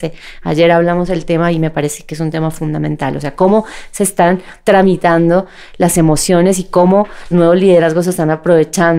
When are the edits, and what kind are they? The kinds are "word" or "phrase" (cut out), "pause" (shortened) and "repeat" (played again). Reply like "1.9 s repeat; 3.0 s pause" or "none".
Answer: 7.3 s word